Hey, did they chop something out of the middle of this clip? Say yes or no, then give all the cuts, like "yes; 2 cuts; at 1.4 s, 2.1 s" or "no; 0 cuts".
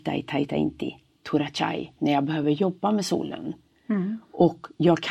no; 0 cuts